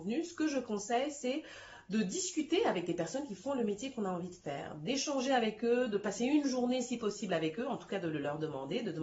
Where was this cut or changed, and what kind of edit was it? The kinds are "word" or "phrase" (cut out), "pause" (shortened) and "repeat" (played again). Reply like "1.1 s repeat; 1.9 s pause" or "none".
none

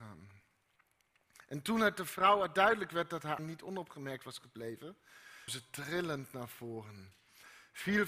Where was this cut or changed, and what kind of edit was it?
3.4 s word; 5.5 s word

